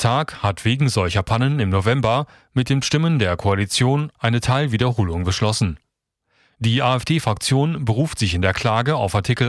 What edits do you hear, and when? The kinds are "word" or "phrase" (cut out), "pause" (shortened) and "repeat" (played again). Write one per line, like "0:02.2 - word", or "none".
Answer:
none